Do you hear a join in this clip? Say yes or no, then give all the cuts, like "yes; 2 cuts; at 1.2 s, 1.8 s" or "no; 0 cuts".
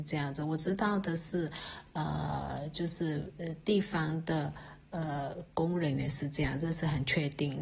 no; 0 cuts